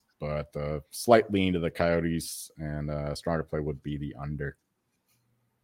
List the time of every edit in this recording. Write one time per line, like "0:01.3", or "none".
none